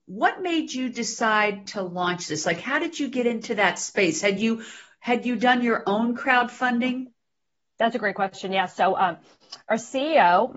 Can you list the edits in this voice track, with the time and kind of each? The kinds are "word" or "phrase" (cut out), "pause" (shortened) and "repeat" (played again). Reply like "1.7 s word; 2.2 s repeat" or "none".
none